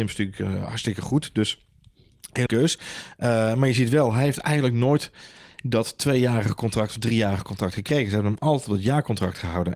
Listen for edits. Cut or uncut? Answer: cut